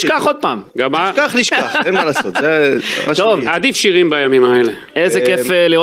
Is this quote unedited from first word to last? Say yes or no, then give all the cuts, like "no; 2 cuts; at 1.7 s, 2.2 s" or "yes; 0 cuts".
no; 1 cut; at 3.7 s